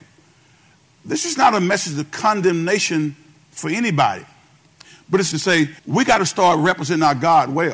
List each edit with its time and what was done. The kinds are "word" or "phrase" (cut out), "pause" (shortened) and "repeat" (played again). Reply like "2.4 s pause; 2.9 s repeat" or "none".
5.3 s phrase; 5.8 s pause